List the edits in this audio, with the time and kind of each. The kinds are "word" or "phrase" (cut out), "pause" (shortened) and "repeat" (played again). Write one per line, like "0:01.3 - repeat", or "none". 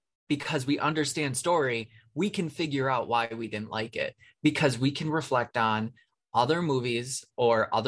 none